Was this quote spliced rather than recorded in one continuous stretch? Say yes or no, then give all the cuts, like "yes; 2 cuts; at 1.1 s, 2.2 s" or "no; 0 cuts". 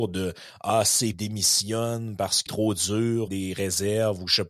yes; 3 cuts; at 1.1 s, 2.5 s, 3.3 s